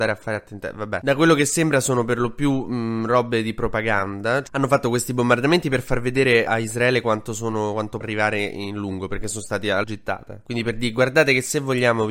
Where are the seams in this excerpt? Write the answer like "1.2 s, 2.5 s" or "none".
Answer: 6.5 s, 8.0 s, 9.8 s